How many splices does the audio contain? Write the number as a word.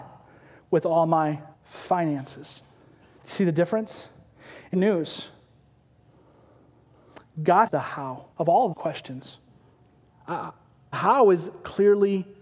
six